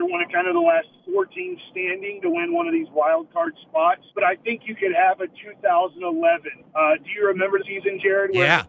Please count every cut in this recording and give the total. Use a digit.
3